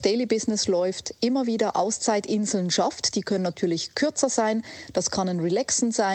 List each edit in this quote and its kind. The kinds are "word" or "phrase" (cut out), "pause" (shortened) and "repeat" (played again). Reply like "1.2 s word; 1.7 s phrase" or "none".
none